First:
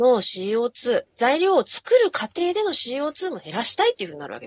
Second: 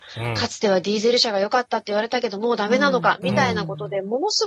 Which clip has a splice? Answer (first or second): first